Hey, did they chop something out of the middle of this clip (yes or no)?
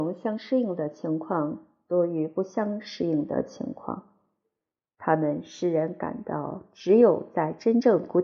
no